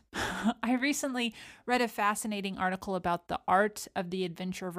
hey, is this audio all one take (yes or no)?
yes